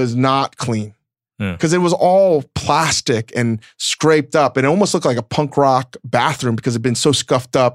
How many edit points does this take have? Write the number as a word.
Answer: zero